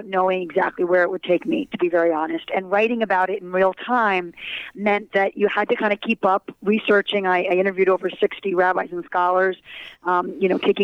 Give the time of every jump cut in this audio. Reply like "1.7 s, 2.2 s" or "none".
none